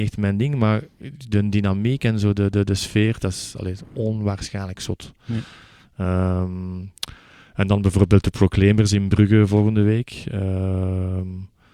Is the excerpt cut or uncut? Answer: uncut